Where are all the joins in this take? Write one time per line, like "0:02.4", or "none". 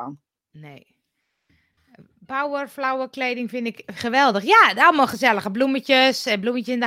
none